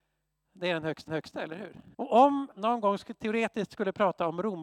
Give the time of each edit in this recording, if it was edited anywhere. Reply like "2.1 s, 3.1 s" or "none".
1.1 s, 1.9 s, 2.5 s